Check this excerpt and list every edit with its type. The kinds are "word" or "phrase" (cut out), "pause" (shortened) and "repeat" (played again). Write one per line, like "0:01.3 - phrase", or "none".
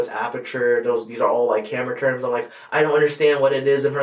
none